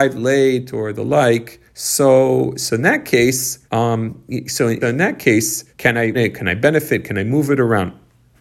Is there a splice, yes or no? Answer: yes